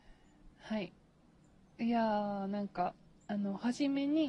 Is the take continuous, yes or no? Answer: yes